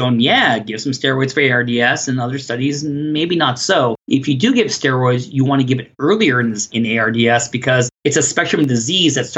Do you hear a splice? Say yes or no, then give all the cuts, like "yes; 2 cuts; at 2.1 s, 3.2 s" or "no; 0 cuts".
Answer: yes; 2 cuts; at 4.0 s, 6.7 s